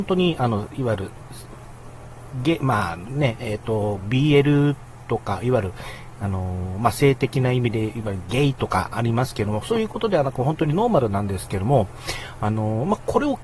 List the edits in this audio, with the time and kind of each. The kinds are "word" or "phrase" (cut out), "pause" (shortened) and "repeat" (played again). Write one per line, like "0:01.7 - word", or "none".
none